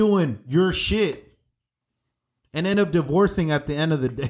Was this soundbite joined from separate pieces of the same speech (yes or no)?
no